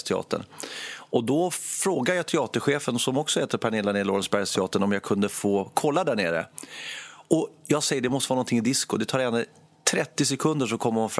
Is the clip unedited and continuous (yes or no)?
yes